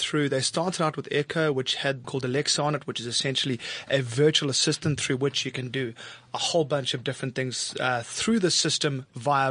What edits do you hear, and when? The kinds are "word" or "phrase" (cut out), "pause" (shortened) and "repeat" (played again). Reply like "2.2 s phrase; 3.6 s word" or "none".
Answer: 2.0 s phrase